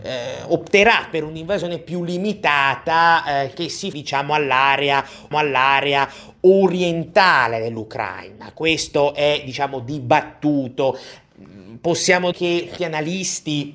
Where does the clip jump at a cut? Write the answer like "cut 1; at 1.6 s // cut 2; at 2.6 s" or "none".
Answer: cut 1; at 3.9 s // cut 2; at 5.3 s // cut 3; at 12.3 s // cut 4; at 12.8 s